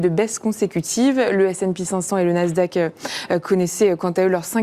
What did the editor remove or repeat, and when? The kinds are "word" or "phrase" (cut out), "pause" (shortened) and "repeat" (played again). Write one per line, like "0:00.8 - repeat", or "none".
none